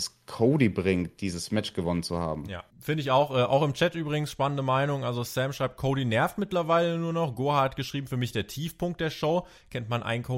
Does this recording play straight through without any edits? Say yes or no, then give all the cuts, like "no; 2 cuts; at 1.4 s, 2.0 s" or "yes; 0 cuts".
no; 1 cut; at 2.7 s